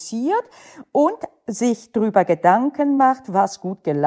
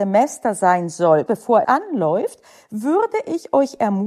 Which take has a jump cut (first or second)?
second